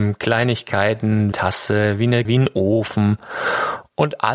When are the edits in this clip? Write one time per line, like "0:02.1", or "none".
0:01.3
0:02.2